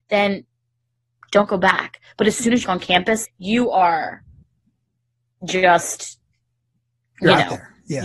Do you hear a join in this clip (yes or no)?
yes